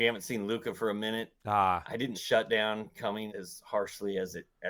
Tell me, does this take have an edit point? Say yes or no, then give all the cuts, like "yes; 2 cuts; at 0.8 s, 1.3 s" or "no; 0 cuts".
yes; 3 cuts; at 1.4 s, 2.1 s, 3.3 s